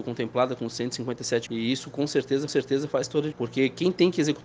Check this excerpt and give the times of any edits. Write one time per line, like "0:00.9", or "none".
0:01.5
0:02.5
0:03.3